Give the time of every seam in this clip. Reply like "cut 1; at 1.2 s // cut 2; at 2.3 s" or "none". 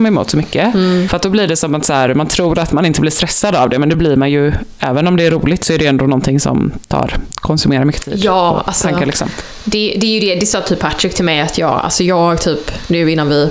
none